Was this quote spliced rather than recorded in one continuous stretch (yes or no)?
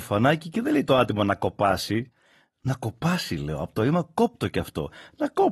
no